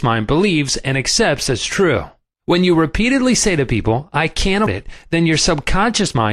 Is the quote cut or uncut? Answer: cut